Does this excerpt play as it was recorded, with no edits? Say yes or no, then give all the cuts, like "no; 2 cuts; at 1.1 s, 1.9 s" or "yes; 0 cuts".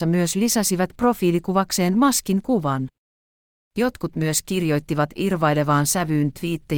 yes; 0 cuts